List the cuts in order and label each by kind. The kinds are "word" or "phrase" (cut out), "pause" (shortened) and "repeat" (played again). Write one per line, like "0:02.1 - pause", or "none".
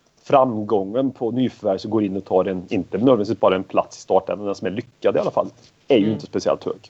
none